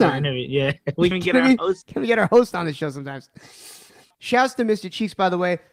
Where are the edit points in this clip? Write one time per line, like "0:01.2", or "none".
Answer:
0:01.1